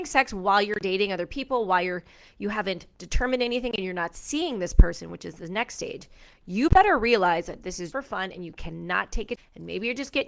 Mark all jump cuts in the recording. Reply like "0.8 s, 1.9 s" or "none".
7.9 s, 9.4 s